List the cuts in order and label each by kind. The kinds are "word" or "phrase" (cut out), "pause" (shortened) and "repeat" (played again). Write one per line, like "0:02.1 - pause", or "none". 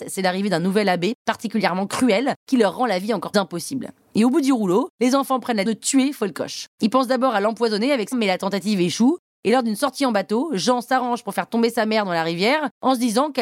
0:03.3 - word
0:05.6 - word
0:06.7 - pause
0:08.1 - word